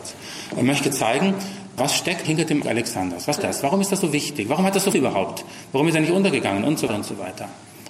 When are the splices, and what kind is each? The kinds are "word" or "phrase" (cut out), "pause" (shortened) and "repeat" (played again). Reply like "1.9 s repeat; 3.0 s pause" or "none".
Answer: 1.8 s word; 2.2 s word; 2.6 s word; 3.4 s word; 4.9 s word; 6.9 s word